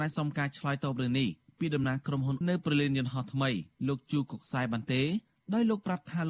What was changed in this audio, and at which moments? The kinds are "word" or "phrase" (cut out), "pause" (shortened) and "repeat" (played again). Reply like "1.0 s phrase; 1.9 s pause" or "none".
2.4 s word